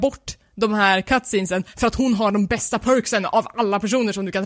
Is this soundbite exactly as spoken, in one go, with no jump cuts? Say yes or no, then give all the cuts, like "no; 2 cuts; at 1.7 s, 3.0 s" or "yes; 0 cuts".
yes; 0 cuts